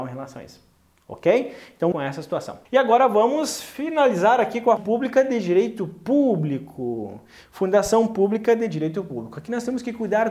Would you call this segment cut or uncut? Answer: cut